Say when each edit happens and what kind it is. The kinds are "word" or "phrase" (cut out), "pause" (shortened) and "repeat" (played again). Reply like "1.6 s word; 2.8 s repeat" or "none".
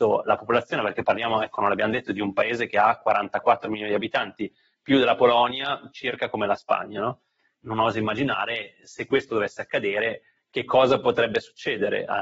none